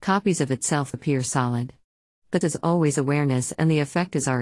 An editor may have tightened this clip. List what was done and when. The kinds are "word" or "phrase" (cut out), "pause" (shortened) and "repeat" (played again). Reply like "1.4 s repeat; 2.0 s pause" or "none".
0.9 s word; 2.4 s word